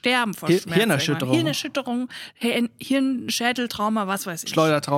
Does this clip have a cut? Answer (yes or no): no